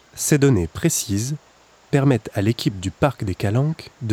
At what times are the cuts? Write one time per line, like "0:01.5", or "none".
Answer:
none